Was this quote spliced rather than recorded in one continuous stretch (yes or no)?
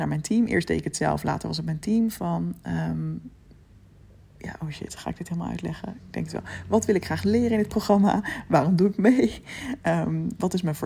no